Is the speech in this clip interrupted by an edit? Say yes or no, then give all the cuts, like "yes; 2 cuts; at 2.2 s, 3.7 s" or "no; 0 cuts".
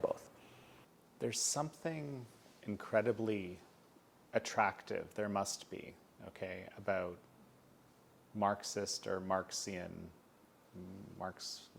no; 0 cuts